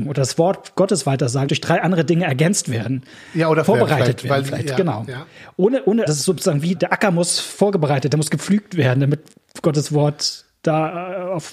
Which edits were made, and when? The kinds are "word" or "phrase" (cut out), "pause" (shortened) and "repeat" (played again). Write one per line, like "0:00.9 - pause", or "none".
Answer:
0:01.5 - word
0:03.7 - word
0:06.1 - word
0:06.8 - word